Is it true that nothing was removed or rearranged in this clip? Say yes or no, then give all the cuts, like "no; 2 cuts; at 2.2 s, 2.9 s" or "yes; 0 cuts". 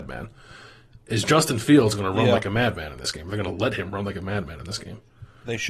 yes; 0 cuts